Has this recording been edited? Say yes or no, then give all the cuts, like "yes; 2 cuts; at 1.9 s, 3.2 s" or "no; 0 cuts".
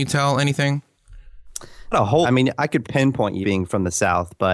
yes; 4 cuts; at 1.9 s, 2.2 s, 2.8 s, 3.4 s